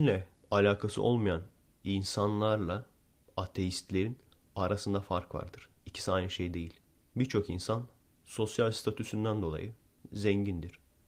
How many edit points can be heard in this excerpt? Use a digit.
0